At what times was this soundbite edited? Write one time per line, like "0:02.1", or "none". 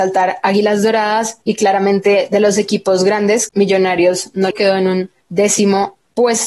0:01.4
0:03.5
0:04.5
0:05.2